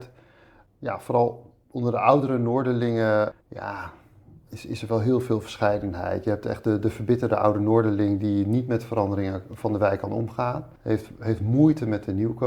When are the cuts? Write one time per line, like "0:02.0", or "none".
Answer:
0:03.4
0:10.8